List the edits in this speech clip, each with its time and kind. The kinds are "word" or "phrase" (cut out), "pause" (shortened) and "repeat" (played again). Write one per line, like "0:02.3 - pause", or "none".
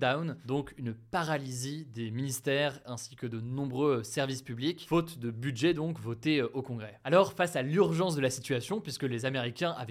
none